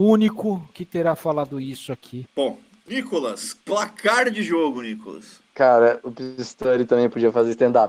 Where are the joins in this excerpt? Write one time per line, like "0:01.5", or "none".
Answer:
0:02.3
0:03.6
0:05.5